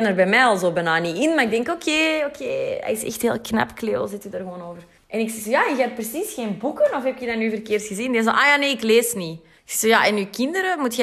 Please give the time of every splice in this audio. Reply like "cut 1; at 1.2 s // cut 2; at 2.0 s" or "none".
cut 1; at 5.0 s // cut 2; at 9.6 s